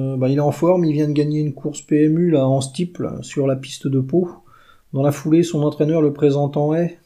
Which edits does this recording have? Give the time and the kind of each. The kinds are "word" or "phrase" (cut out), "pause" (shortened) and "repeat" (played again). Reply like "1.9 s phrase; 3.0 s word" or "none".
none